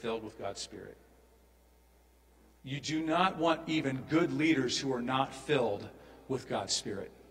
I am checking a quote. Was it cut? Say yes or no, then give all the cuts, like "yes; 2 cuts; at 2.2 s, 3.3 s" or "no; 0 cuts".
no; 0 cuts